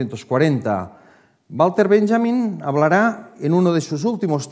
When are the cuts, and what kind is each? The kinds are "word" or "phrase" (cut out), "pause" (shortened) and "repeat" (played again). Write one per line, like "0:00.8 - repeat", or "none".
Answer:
none